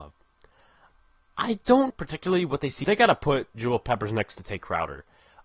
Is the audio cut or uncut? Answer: cut